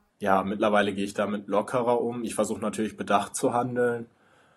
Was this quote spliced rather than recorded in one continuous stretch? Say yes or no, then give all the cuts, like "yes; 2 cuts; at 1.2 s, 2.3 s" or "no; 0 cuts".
no; 0 cuts